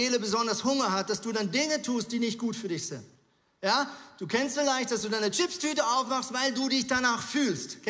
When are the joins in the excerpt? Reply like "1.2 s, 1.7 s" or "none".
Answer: none